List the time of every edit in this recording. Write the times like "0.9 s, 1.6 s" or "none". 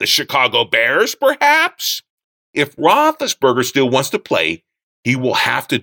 none